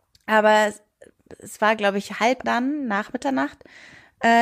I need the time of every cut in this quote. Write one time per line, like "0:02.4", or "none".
0:02.4